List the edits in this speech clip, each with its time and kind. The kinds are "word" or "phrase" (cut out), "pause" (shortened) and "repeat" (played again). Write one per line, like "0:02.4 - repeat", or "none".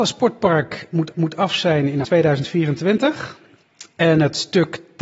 0:01.1 - repeat
0:02.0 - word